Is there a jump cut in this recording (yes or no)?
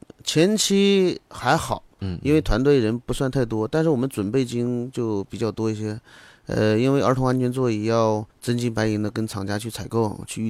yes